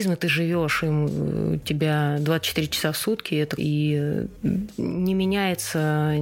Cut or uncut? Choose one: cut